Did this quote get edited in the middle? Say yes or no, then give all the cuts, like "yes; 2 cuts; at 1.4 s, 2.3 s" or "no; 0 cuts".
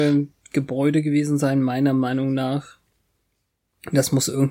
no; 0 cuts